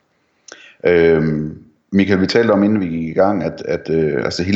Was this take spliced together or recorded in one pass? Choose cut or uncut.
uncut